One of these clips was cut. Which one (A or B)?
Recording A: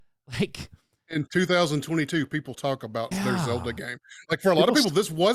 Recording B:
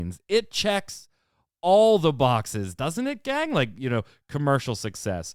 A